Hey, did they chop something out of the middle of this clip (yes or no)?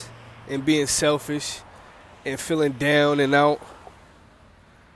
no